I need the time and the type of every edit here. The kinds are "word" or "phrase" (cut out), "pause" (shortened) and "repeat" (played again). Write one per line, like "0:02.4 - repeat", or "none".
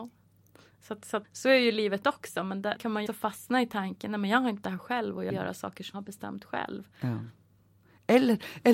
0:01.2 - word
0:02.8 - word
0:03.1 - word
0:04.6 - word
0:05.3 - word
0:05.9 - word